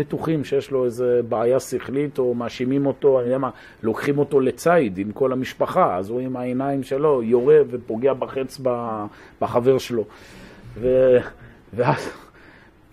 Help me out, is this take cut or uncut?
uncut